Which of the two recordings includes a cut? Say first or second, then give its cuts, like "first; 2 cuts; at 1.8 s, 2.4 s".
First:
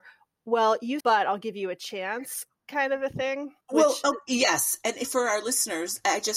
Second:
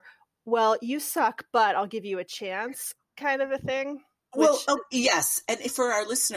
first; 2 cuts; at 1.0 s, 3.6 s